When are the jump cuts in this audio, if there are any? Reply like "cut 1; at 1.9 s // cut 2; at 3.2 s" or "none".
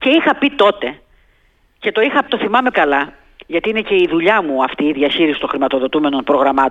cut 1; at 2.3 s // cut 2; at 2.7 s